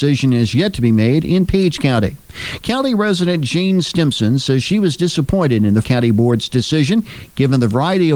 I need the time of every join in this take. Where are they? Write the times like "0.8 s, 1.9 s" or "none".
5.8 s